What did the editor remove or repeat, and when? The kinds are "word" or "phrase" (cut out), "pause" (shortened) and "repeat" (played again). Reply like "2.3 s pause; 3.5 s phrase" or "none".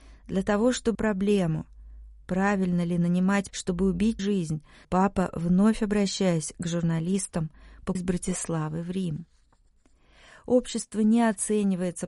0.9 s word; 3.5 s word; 4.2 s word; 4.8 s word; 8.0 s word

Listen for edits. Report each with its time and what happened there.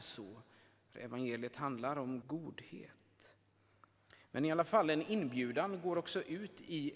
2.2 s phrase

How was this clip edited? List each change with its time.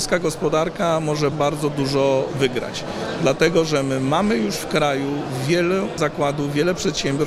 1.3 s word; 6.0 s word

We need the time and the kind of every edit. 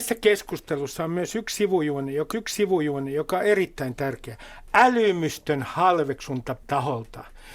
2.3 s repeat; 6.6 s word

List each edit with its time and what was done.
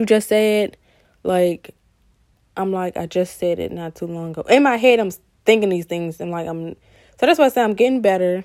none

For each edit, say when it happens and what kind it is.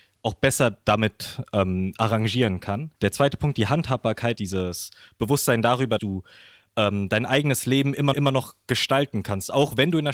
3.0 s pause; 4.4 s phrase; 6.0 s word; 8.1 s repeat

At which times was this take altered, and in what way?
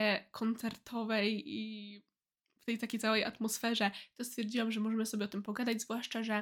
none

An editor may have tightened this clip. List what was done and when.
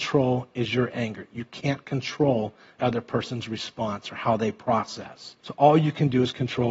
2.8 s word; 5.4 s pause

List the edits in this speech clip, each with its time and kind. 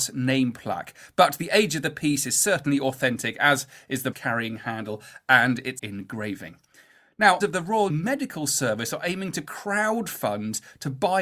4.1 s word; 5.8 s word; 7.4 s word; 7.9 s word

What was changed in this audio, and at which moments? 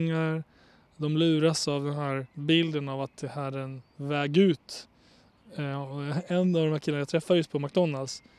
2.3 s pause

